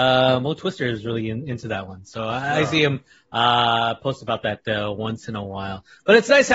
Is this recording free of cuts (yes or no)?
yes